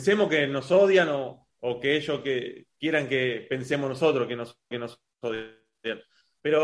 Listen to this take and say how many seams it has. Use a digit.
1